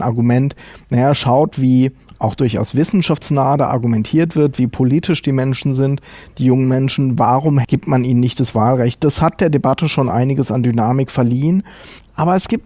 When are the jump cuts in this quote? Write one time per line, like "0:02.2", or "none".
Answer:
none